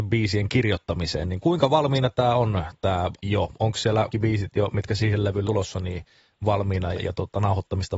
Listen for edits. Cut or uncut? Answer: cut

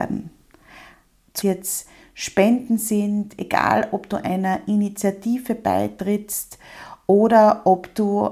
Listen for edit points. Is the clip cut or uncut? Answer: cut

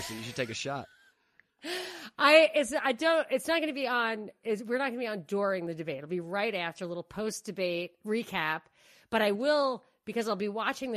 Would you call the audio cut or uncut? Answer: uncut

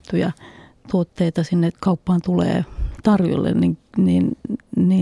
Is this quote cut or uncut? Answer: cut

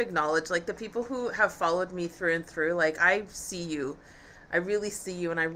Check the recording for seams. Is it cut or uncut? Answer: uncut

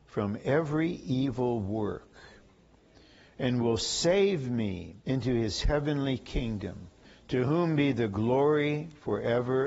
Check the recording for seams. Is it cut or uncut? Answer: cut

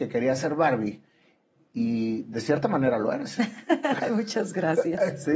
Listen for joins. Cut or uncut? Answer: uncut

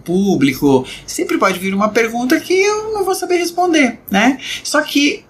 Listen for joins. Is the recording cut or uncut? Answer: uncut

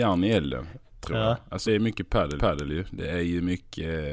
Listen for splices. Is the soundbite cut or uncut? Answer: cut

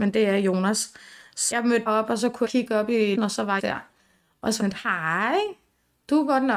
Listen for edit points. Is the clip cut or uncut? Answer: cut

